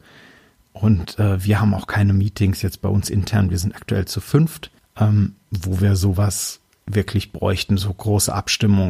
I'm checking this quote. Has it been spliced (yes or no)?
no